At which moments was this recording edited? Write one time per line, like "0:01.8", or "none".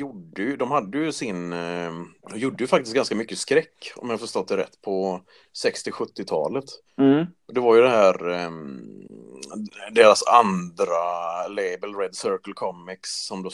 0:02.2
0:06.9